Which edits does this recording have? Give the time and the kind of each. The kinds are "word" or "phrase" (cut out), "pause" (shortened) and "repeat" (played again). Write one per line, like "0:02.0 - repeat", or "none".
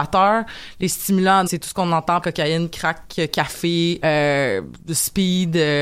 0:01.5 - word
0:02.2 - word
0:04.0 - word